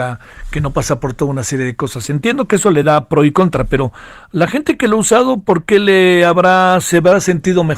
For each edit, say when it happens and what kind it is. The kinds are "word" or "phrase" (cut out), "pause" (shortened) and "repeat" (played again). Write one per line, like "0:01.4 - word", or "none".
none